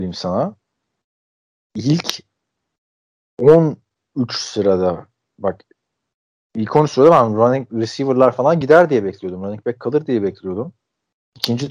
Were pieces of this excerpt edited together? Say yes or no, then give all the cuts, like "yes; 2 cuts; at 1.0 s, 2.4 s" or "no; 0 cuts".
no; 0 cuts